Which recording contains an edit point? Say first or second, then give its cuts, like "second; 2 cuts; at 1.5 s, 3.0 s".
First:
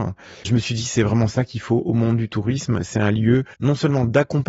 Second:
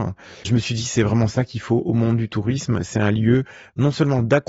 first; 1 cut; at 3.5 s